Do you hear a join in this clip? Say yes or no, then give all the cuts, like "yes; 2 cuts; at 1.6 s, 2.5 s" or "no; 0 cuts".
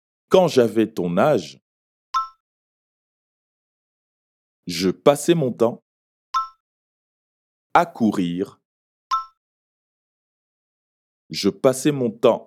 yes; 1 cut; at 7.3 s